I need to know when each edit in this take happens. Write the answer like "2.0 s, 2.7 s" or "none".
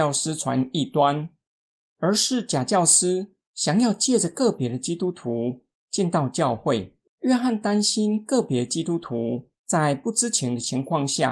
7.1 s, 9.5 s